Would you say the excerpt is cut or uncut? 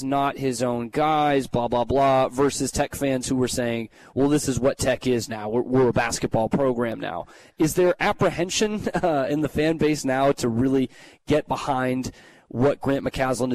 uncut